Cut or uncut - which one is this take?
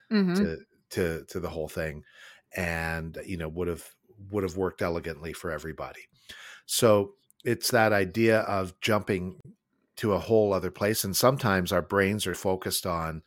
cut